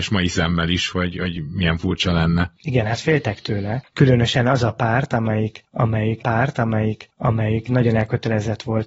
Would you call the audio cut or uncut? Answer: cut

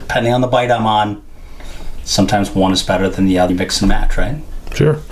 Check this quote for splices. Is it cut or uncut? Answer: cut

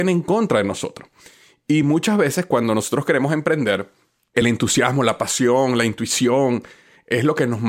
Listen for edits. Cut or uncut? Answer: uncut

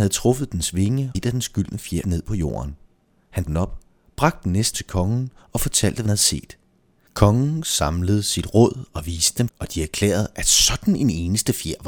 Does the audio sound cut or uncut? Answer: cut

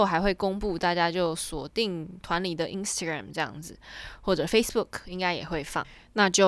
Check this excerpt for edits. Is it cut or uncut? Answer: uncut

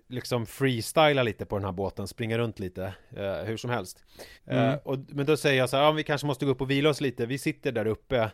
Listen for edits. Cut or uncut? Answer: cut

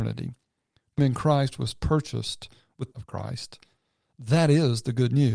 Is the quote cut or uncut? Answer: cut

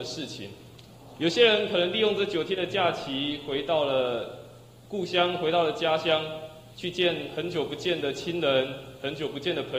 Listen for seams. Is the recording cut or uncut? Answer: cut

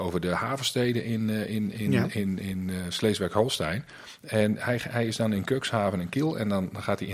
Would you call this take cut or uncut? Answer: uncut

